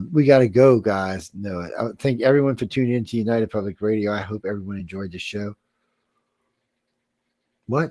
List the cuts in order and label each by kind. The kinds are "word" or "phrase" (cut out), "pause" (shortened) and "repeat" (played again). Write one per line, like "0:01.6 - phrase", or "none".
none

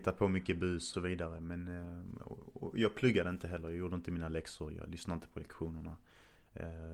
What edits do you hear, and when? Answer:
0:00.9 - phrase

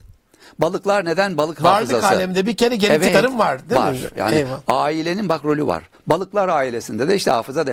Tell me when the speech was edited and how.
0:03.1 - word

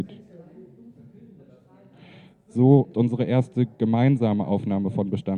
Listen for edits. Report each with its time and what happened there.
0:02.9 - word

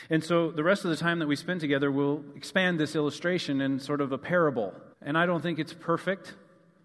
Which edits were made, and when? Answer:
0:04.9 - pause

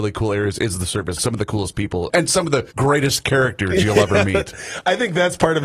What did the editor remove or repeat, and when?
0:01.2 - phrase
0:02.1 - word
0:02.7 - pause

